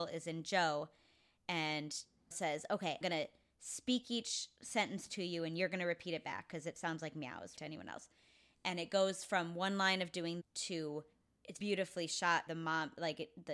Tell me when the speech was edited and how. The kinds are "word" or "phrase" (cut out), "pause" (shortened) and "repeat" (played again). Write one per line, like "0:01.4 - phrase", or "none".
0:02.3 - word
0:03.0 - word
0:07.6 - word
0:10.4 - word
0:11.6 - word
0:12.5 - word